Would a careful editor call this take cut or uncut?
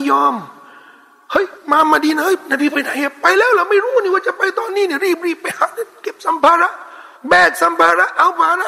cut